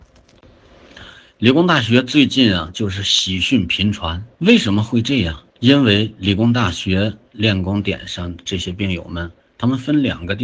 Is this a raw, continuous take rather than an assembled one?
no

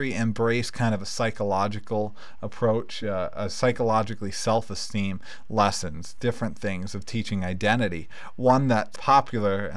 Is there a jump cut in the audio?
no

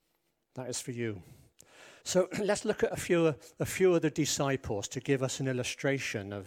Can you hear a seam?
yes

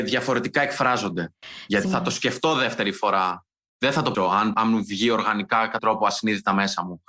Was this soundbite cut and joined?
yes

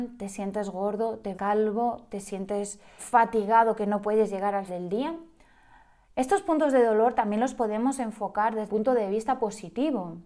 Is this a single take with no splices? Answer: no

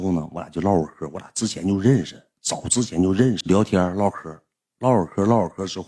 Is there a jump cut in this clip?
no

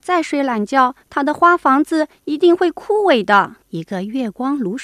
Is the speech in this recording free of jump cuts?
no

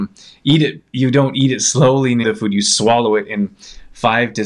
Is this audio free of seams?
no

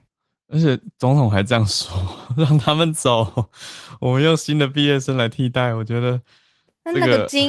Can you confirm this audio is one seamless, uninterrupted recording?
yes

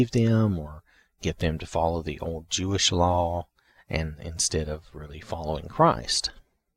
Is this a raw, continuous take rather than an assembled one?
yes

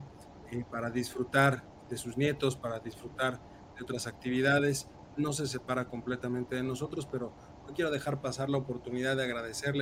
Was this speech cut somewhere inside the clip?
no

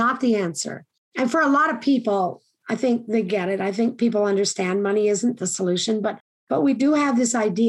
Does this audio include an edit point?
no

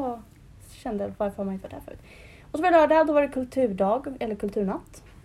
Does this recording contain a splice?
no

